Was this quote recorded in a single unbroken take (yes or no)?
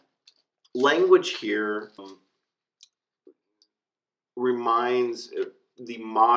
no